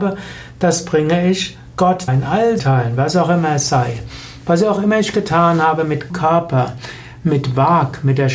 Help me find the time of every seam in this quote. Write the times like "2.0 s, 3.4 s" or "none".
2.1 s, 2.6 s, 6.1 s